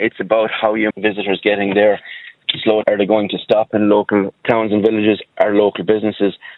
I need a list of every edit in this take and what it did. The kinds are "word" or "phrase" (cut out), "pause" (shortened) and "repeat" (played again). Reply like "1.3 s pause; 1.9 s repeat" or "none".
0.9 s word; 2.8 s word; 4.4 s word